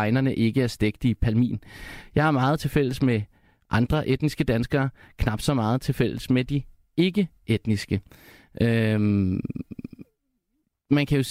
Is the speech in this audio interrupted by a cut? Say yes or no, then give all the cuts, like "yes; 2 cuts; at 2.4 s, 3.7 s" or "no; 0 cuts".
no; 0 cuts